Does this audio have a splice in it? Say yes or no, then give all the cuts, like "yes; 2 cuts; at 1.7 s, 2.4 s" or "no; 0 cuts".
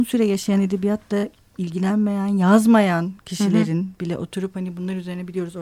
no; 0 cuts